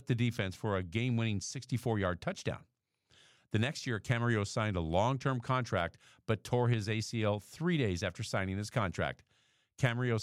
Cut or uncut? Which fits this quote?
uncut